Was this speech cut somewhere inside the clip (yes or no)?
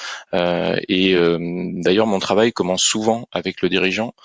no